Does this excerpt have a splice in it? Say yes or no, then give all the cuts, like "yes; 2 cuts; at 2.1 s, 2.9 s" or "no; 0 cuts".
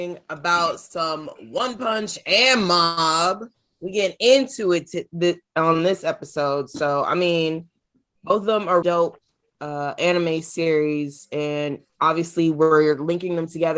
yes; 1 cut; at 8.8 s